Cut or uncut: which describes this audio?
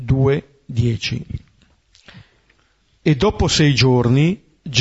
uncut